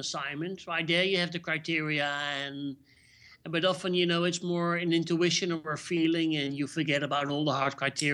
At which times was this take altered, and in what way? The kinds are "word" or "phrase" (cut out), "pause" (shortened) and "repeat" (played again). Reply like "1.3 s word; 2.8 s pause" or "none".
none